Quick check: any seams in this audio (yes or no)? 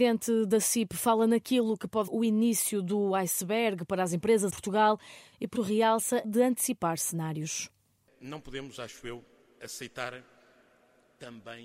yes